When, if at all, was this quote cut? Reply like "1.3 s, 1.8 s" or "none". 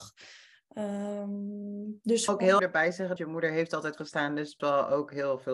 2.3 s, 2.6 s, 3.2 s, 4.0 s, 4.6 s